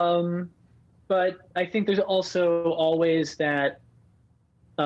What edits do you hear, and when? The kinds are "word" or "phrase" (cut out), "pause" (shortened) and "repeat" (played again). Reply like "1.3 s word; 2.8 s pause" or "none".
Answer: none